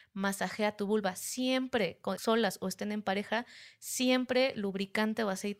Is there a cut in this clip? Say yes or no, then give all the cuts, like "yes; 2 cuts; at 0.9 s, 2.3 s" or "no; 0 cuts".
yes; 1 cut; at 2.1 s